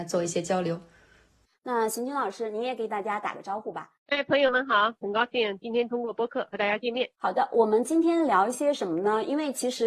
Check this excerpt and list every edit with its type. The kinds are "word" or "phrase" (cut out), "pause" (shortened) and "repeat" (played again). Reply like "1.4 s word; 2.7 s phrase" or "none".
4.0 s pause; 7.1 s pause